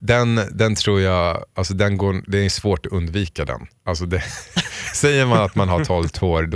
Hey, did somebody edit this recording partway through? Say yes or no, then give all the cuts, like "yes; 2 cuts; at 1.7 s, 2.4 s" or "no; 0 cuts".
no; 0 cuts